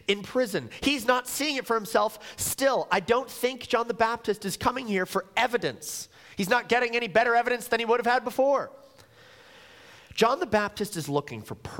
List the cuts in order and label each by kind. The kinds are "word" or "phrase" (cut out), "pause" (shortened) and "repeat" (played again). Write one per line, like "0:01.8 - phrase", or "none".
none